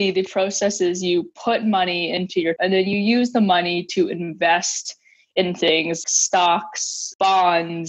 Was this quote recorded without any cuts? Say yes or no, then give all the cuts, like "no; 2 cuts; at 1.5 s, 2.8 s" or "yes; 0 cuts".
no; 2 cuts; at 2.6 s, 6.0 s